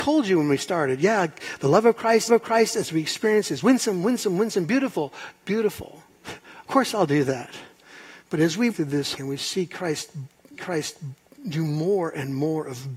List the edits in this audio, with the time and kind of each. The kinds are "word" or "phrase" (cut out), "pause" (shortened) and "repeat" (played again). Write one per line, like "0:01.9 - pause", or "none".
0:02.3 - repeat
0:06.6 - pause
0:08.2 - pause
0:08.7 - phrase
0:09.1 - phrase
0:10.5 - repeat